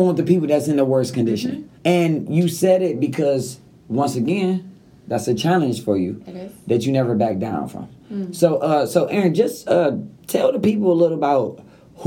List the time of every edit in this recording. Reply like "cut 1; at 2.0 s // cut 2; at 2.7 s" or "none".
cut 1; at 1.8 s